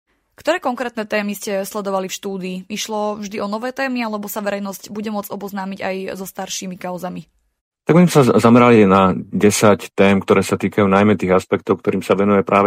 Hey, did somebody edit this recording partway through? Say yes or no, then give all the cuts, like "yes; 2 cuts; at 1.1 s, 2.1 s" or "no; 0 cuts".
no; 0 cuts